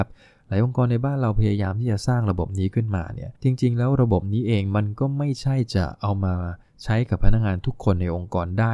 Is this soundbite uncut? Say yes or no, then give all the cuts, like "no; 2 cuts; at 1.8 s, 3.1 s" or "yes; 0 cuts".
no; 1 cut; at 3.4 s